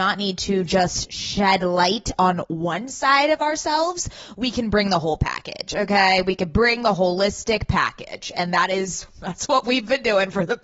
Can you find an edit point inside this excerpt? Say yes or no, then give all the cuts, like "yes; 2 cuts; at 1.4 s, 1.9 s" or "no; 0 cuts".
no; 0 cuts